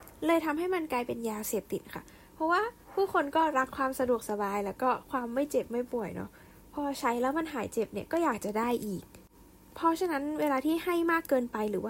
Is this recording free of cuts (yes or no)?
yes